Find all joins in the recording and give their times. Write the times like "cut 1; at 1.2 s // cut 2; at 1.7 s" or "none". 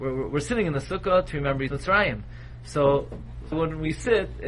cut 1; at 1.7 s // cut 2; at 3.5 s